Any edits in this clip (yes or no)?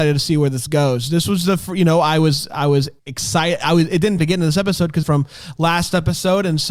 yes